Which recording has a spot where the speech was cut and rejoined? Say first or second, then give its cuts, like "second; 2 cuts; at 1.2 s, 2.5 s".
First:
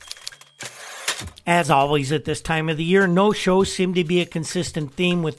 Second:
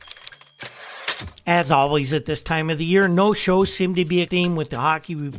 second; 1 cut; at 4.3 s